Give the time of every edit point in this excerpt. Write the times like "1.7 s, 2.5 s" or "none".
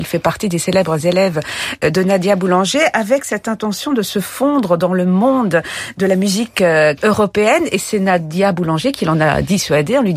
7.0 s